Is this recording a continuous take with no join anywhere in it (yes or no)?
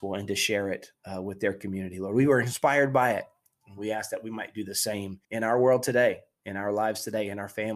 no